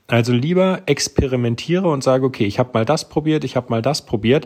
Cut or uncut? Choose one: uncut